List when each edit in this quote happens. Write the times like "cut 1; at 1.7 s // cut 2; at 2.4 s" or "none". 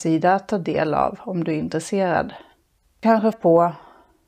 cut 1; at 3.3 s